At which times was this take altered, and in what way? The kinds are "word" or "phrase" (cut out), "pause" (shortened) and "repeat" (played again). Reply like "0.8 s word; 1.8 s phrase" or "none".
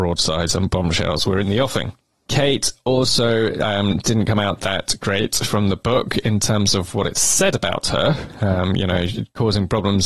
none